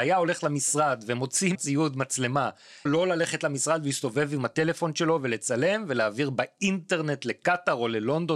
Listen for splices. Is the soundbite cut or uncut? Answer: cut